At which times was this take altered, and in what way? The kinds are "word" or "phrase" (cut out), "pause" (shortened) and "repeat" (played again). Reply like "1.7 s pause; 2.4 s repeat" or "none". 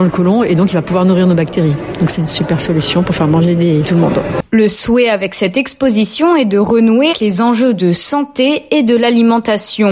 2.2 s word; 3.8 s phrase; 7.1 s word